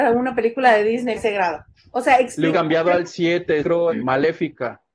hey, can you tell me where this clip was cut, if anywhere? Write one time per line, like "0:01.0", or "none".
0:01.1
0:01.8
0:02.5
0:03.6
0:03.9